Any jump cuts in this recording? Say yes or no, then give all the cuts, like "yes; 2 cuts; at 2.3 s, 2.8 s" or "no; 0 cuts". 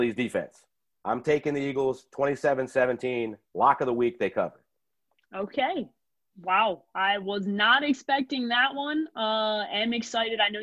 no; 0 cuts